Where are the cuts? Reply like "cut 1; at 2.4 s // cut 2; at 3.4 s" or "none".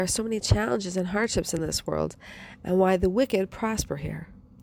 none